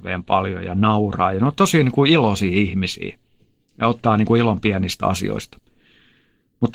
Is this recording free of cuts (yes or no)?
yes